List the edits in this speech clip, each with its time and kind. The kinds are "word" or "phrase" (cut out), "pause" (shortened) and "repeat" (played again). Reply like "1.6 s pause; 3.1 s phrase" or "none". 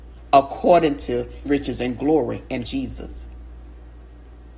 1.5 s word; 2.7 s word